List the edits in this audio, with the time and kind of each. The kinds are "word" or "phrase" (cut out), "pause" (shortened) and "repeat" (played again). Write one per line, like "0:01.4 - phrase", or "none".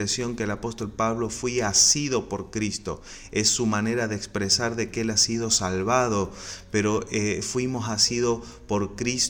none

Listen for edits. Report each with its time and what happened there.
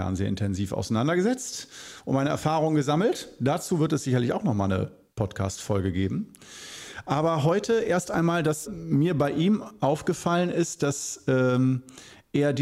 0:08.7 - word

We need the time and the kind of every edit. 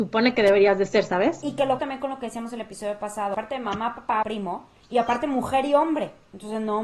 0:01.8 - word
0:04.2 - phrase

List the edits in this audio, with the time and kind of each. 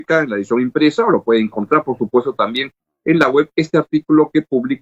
none

